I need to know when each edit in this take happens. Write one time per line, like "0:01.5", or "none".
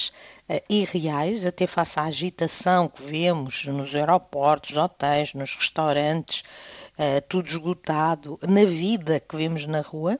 0:04.7